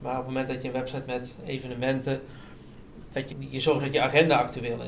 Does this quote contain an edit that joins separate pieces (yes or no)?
yes